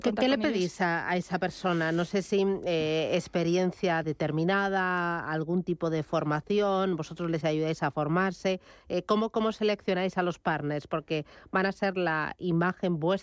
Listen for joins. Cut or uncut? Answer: uncut